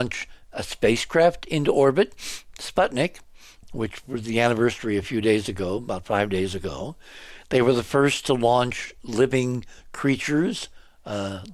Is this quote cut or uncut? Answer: uncut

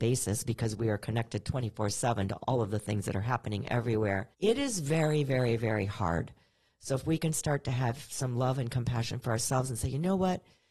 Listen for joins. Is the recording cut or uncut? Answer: cut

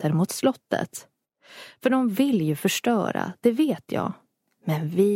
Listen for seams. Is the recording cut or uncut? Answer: uncut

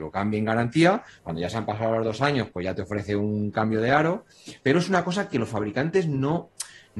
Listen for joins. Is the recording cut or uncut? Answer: uncut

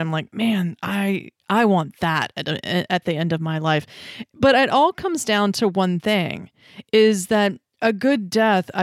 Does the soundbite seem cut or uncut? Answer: uncut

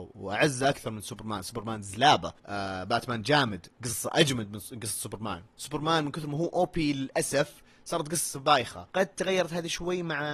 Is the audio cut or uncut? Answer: cut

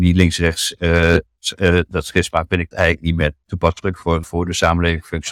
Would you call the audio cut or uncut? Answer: cut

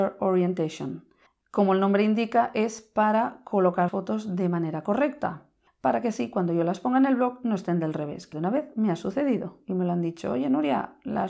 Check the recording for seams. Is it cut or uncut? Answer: cut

